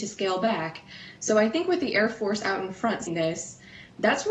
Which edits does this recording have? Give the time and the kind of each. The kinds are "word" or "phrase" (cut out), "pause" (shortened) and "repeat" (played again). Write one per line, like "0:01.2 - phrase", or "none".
0:03.1 - word